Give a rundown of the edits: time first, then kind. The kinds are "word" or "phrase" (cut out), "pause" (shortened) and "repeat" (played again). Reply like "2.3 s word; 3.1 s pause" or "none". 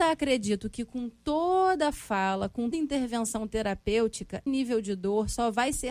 2.7 s word; 4.5 s word